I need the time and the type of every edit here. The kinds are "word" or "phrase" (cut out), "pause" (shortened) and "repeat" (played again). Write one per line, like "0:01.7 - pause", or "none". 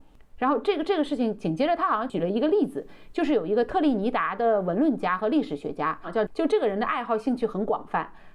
0:06.3 - word